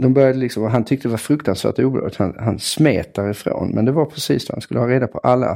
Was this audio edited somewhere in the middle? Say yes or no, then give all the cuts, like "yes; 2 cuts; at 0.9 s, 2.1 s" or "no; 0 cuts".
no; 0 cuts